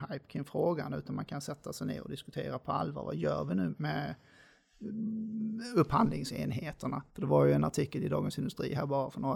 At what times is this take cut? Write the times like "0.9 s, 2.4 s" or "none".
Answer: 3.7 s, 7.1 s